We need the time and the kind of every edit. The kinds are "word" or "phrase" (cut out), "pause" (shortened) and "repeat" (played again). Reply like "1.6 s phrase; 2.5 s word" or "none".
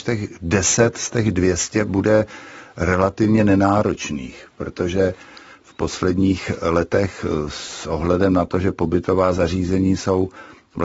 none